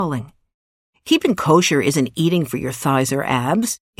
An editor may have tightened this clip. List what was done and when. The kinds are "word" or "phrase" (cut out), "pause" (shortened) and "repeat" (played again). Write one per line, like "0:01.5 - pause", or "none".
none